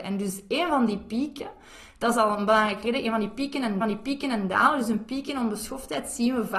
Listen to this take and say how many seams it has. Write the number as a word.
one